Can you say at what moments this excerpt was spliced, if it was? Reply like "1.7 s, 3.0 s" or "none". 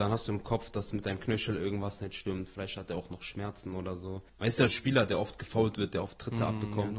4.3 s, 4.7 s